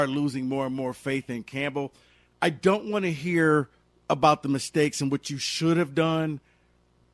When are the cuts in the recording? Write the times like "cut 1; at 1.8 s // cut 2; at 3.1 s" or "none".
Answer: none